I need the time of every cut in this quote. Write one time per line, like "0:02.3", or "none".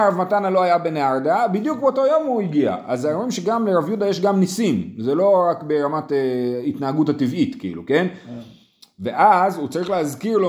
none